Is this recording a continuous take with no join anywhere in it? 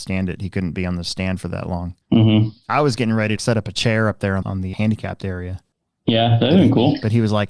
no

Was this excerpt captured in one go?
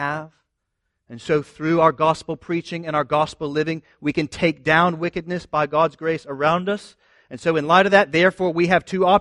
yes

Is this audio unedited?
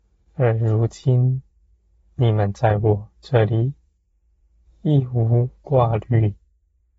yes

